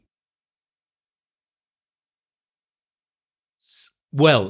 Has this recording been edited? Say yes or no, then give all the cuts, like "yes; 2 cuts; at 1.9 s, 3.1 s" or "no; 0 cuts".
no; 0 cuts